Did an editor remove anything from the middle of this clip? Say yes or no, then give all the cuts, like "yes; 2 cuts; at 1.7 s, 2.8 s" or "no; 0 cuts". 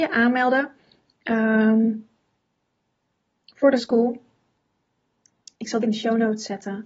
yes; 2 cuts; at 3.8 s, 5.8 s